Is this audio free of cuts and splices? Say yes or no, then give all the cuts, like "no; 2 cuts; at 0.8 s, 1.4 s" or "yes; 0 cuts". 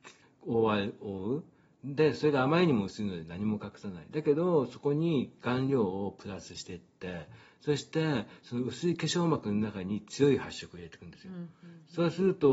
yes; 0 cuts